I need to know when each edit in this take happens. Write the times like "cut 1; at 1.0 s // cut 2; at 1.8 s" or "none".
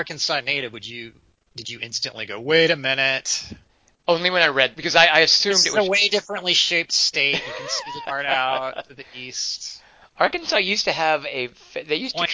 cut 1; at 4.7 s // cut 2; at 8.0 s